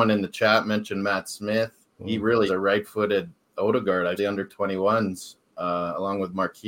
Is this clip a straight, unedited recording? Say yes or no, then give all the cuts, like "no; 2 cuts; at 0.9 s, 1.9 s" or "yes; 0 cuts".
no; 3 cuts; at 1.9 s, 2.5 s, 4.2 s